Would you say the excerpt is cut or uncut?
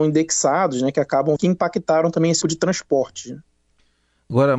cut